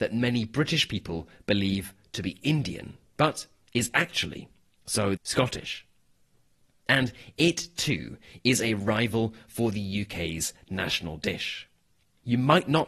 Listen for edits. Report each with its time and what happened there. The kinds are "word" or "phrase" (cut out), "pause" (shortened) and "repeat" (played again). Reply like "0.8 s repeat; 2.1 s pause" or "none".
5.2 s phrase